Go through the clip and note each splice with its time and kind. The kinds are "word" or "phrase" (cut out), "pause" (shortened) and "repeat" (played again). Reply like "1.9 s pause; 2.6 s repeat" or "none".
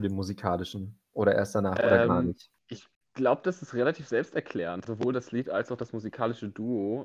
4.9 s word